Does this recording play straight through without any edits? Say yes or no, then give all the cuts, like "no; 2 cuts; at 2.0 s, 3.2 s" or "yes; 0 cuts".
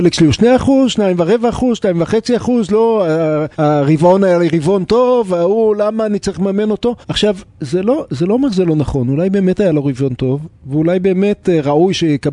no; 2 cuts; at 3.5 s, 7.0 s